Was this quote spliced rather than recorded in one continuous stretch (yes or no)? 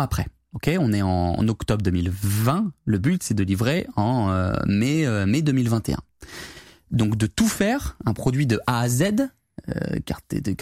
no